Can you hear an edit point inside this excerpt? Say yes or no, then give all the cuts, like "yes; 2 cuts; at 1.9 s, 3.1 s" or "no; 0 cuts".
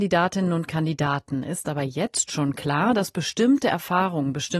no; 0 cuts